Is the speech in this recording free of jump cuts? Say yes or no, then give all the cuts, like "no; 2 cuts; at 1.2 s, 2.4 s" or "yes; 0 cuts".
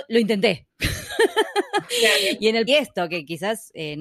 no; 1 cut; at 2.7 s